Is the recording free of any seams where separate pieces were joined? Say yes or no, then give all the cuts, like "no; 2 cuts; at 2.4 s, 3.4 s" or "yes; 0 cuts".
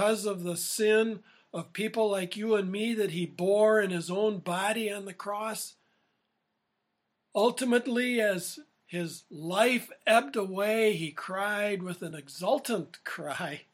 yes; 0 cuts